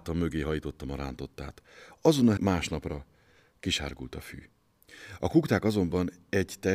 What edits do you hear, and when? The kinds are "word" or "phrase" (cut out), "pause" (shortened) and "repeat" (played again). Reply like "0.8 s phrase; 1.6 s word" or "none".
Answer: 2.4 s word

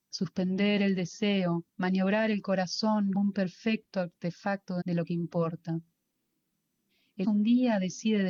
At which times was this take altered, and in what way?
1.7 s pause; 3.1 s word; 4.8 s word; 7.2 s word

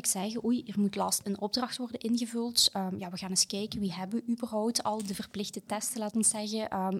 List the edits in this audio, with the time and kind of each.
1.2 s word

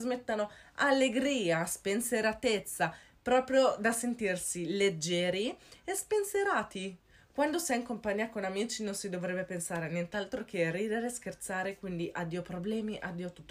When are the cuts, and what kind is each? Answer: none

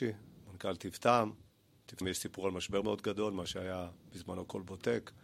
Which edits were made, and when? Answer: 2.0 s word; 2.8 s word

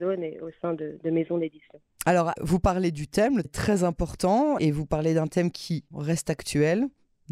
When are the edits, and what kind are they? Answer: 2.4 s word; 3.4 s word; 4.6 s word; 5.9 s word

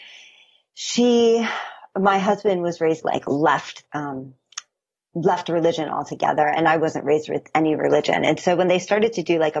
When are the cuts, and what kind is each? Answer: 3.0 s phrase; 3.9 s word

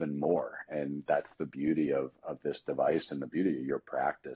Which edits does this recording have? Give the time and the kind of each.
none

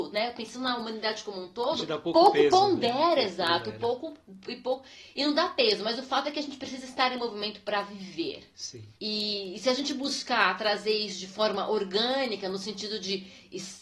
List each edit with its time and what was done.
8.9 s pause

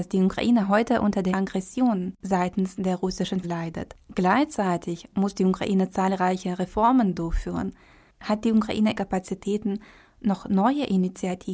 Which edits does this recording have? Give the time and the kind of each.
1.3 s word; 3.4 s word; 9.0 s word

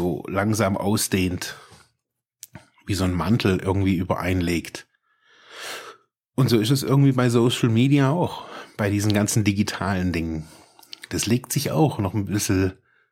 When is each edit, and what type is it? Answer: none

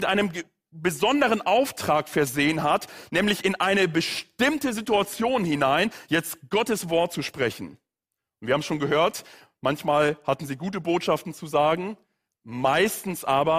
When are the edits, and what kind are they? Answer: none

